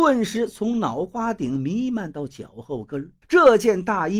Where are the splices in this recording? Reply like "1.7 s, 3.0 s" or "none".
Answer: 3.2 s